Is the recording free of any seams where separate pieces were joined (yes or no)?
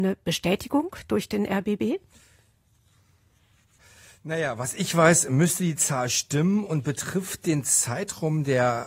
yes